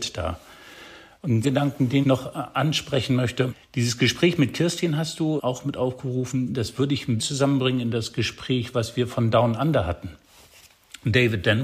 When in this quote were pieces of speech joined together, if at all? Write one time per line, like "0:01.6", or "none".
0:01.4
0:02.0
0:05.4
0:07.2